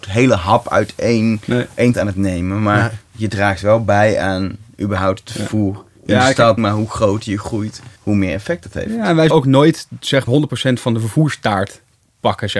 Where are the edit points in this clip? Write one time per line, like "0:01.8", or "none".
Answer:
0:01.9
0:06.6
0:08.0
0:09.3
0:10.3